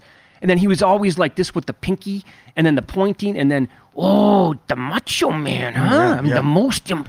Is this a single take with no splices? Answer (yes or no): yes